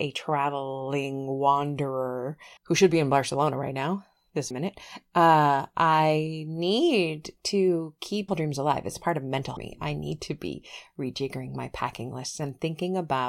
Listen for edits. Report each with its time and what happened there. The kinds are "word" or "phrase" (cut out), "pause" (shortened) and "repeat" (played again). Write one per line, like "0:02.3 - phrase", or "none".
0:02.6 - pause
0:04.5 - word
0:08.3 - word
0:09.6 - phrase